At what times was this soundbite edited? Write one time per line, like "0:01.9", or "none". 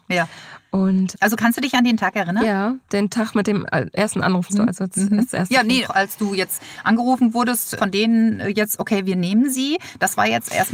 0:01.1
0:04.5
0:05.8
0:07.8